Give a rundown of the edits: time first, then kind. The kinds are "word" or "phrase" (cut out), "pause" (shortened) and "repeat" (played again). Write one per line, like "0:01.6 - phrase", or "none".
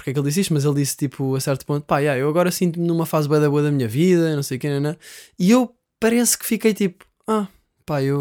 none